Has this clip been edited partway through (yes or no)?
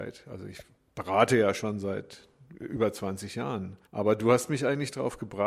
yes